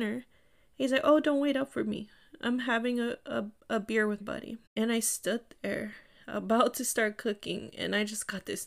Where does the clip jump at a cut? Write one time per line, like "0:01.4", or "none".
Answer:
0:04.2
0:04.7